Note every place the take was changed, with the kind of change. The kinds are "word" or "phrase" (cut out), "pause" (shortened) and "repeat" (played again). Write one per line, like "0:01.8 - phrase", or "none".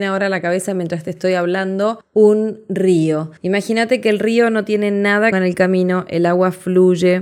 0:03.4 - pause
0:05.3 - phrase